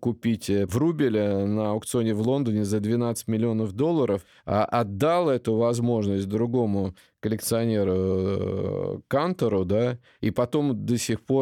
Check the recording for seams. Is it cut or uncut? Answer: uncut